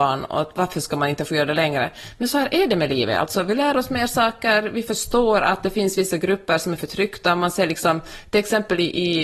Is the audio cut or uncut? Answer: uncut